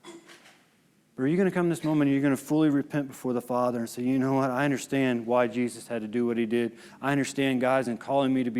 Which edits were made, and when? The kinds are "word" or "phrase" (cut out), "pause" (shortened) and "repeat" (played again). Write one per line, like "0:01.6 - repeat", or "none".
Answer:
none